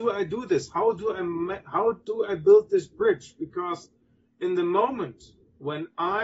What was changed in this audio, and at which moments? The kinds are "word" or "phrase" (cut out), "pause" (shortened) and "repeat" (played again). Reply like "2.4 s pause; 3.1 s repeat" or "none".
none

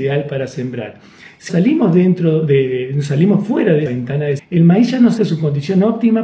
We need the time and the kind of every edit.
1.5 s word; 3.9 s word; 4.4 s word; 5.2 s word

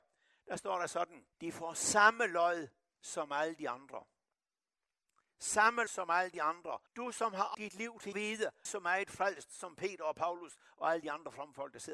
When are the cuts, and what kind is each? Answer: 1.3 s pause; 5.9 s word; 6.9 s pause; 7.5 s word; 8.1 s phrase; 8.7 s phrase

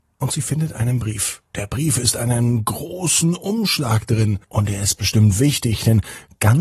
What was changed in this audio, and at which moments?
1.5 s pause; 4.4 s pause

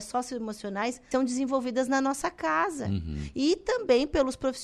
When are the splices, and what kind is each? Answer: 1.1 s word

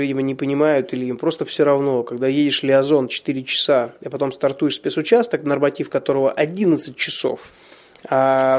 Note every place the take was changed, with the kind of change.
none

